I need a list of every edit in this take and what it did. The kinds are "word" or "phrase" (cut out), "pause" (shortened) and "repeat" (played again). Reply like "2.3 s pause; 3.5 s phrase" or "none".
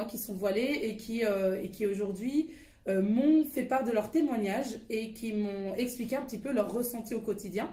none

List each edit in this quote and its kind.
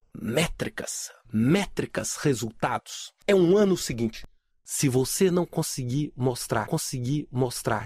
3.2 s pause; 6.6 s repeat

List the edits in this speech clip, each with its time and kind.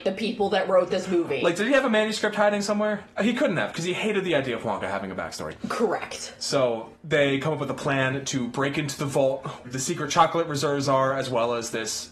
6.9 s pause; 9.6 s word

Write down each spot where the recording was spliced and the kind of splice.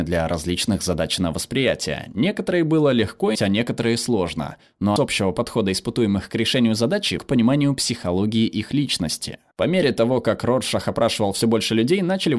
3.3 s word; 5.0 s word; 7.2 s word

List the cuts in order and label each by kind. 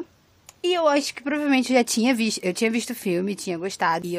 none

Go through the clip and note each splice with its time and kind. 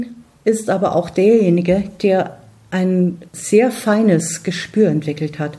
3.3 s pause

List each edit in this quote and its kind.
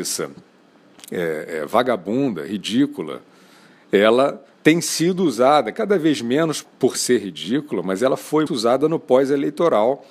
4.5 s pause; 6.6 s word; 8.5 s word

